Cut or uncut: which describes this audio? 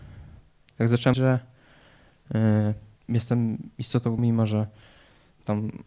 cut